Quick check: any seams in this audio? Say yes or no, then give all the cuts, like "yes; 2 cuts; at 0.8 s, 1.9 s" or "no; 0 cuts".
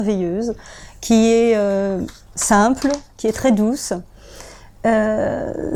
no; 0 cuts